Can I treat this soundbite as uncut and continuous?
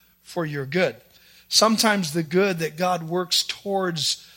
yes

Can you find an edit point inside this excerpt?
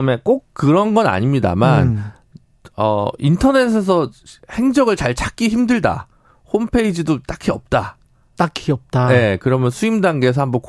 no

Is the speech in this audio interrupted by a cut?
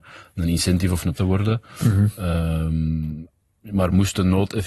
yes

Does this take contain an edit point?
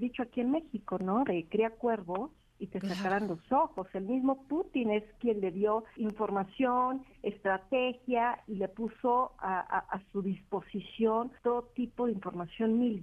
yes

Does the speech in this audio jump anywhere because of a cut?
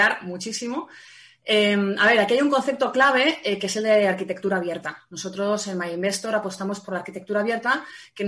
no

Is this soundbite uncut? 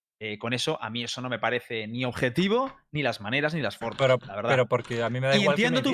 yes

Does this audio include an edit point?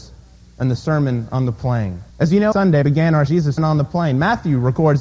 yes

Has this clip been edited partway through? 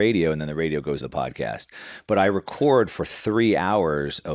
yes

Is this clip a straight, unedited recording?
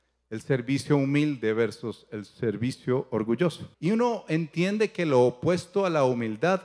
no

